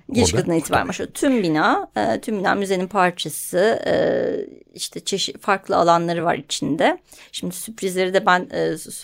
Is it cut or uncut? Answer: uncut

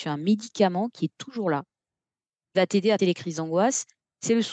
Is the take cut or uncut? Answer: cut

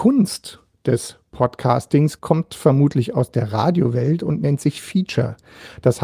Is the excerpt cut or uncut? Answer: uncut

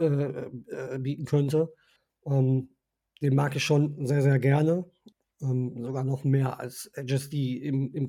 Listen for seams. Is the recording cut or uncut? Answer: uncut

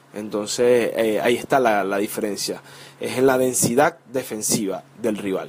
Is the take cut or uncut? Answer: uncut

